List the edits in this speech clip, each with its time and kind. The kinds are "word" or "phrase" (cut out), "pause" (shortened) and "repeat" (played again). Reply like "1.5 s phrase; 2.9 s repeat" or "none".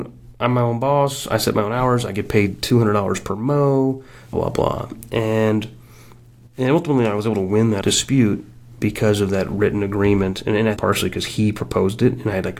4.3 s word; 7.8 s word; 10.8 s word

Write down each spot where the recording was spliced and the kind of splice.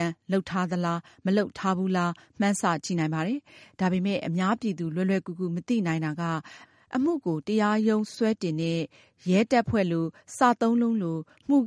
none

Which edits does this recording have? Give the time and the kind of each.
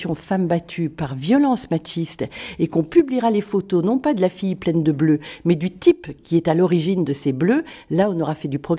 6.2 s pause

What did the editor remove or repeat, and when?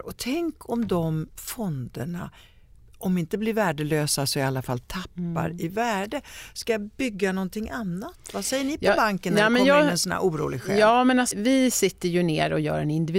11.3 s word

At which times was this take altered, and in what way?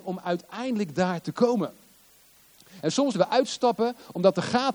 3.1 s word

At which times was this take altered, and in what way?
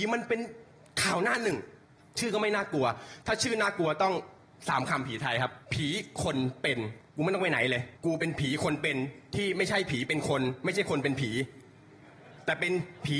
1.8 s pause; 5.6 s pause; 7.1 s pause; 8.0 s pause

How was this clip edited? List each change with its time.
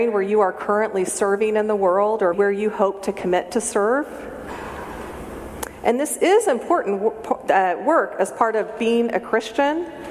2.3 s word

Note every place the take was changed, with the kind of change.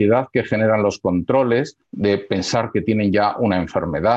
1.8 s pause

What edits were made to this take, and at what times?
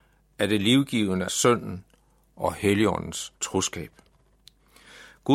1.3 s phrase; 3.4 s pause

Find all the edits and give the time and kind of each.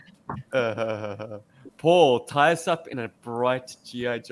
none

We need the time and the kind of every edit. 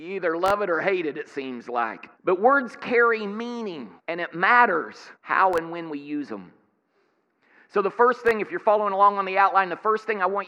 2.1 s pause; 4.0 s pause; 5.1 s pause

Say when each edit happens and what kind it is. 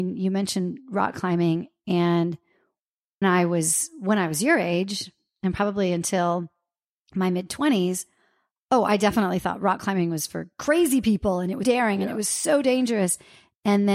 3.2 s word; 11.6 s word

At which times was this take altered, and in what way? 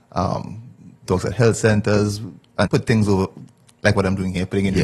1.1 s word; 2.7 s word

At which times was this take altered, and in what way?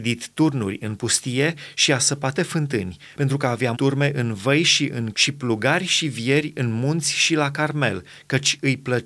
2.3 s word; 3.7 s word; 5.1 s word

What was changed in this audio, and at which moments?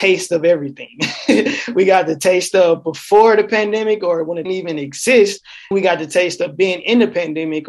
4.5 s phrase; 5.7 s word

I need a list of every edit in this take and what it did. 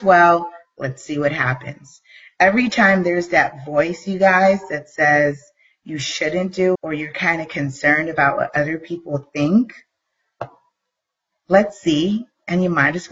6.7 s word

